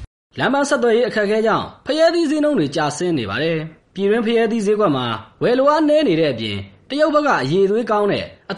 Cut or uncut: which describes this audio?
cut